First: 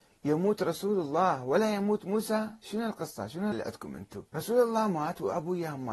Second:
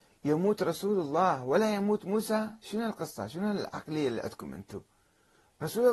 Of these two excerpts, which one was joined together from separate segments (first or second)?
first